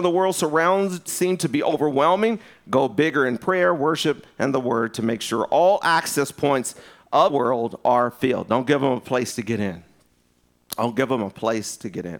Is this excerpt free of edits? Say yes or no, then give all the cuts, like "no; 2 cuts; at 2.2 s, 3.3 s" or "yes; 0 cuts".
no; 2 cuts; at 1.1 s, 7.3 s